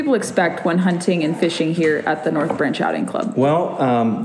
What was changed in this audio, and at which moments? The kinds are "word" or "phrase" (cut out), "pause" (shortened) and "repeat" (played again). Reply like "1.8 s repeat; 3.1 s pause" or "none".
none